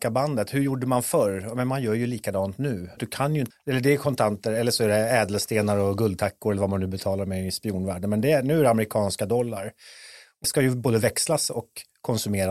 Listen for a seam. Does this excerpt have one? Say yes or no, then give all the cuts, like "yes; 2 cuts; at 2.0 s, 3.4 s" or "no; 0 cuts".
yes; 3 cuts; at 3.0 s, 3.5 s, 10.4 s